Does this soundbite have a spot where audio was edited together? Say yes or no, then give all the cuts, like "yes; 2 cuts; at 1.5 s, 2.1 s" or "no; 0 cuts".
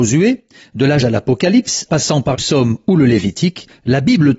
yes; 3 cuts; at 1.0 s, 1.9 s, 2.3 s